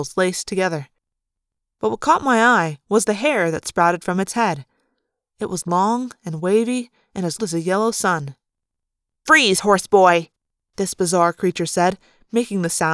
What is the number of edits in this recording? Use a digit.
1